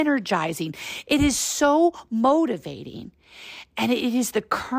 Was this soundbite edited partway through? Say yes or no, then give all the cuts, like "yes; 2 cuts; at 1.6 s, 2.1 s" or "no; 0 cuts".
no; 0 cuts